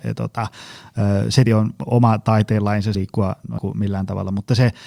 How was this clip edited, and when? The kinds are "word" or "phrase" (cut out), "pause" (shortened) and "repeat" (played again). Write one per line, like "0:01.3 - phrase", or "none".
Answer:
0:01.5 - word
0:02.9 - word
0:03.6 - word